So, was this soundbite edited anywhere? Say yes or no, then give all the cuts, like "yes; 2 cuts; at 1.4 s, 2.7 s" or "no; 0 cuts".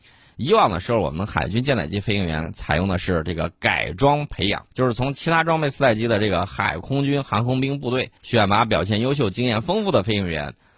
yes; 2 cuts; at 4.7 s, 8.2 s